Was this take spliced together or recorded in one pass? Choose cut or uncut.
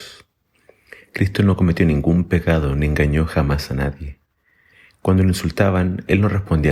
uncut